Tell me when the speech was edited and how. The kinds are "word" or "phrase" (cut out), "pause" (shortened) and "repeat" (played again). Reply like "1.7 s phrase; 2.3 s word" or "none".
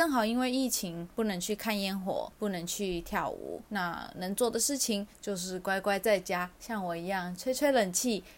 3.7 s pause